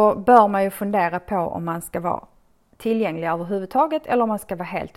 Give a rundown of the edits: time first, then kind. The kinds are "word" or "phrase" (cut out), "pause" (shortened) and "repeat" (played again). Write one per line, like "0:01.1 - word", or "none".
none